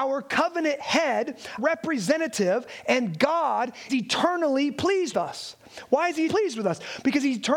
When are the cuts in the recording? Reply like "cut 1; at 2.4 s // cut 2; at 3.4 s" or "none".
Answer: cut 1; at 1.6 s // cut 2; at 3.9 s // cut 3; at 5.1 s // cut 4; at 6.3 s